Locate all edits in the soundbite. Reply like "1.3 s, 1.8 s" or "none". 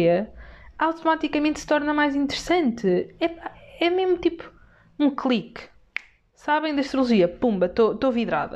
none